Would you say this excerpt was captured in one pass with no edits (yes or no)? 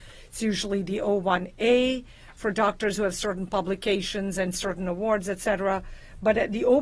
yes